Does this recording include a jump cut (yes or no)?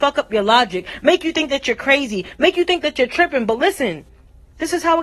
no